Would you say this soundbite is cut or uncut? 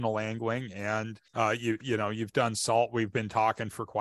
cut